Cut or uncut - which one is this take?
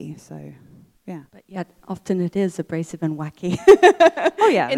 cut